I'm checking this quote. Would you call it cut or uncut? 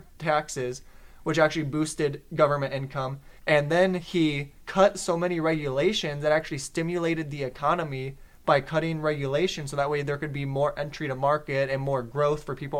cut